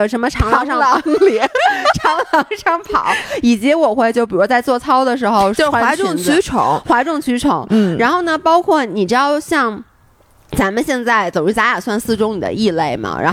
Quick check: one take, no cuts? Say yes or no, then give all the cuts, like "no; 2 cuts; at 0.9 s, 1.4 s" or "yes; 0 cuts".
yes; 0 cuts